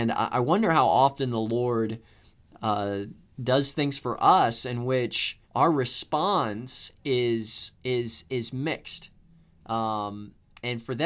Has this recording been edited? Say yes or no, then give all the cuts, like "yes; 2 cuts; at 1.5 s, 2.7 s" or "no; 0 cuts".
yes; 2 cuts; at 5.4 s, 7.7 s